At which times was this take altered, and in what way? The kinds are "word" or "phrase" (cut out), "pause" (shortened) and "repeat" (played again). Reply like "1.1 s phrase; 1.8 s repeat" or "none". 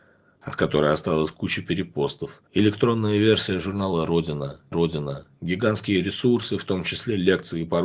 2.5 s pause; 4.7 s repeat